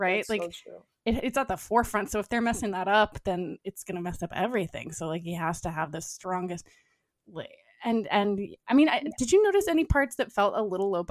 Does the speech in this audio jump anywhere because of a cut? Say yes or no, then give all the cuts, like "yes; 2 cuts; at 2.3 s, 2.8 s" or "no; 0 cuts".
no; 0 cuts